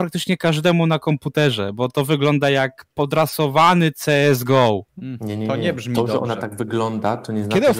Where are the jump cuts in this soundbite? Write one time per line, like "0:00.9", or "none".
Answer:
0:04.9

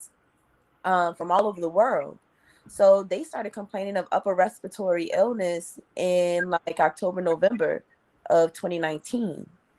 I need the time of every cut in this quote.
none

